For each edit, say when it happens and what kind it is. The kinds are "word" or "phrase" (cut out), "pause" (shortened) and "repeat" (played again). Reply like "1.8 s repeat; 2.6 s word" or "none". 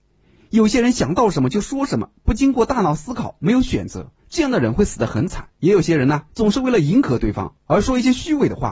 4.2 s pause; 5.6 s pause; 6.3 s pause; 7.6 s pause